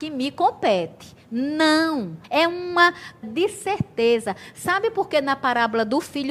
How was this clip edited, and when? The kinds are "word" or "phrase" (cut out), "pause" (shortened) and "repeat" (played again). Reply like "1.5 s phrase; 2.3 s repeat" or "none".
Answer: 2.2 s pause; 3.2 s word